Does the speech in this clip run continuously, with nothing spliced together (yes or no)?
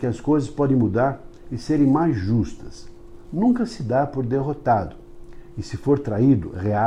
yes